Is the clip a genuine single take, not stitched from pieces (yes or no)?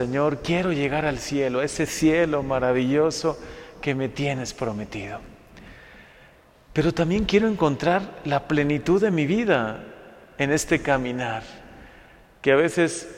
yes